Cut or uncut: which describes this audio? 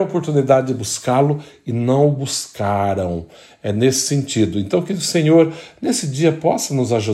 uncut